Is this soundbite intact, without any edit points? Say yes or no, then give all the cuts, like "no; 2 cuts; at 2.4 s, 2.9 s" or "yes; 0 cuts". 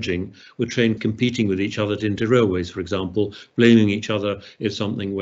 no; 2 cuts; at 1.0 s, 2.0 s